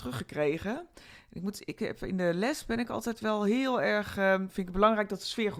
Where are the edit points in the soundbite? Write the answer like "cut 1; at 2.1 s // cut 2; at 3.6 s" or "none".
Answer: none